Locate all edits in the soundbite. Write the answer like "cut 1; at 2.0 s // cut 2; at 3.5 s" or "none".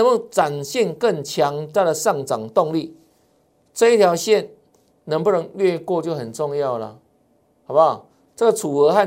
none